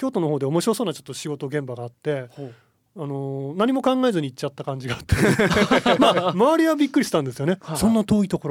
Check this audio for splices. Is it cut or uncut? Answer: uncut